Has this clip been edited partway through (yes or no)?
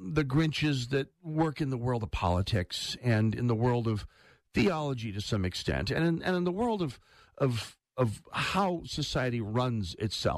no